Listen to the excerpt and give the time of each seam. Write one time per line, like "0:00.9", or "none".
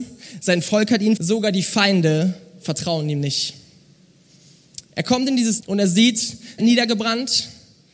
0:01.2
0:04.8
0:05.6
0:06.6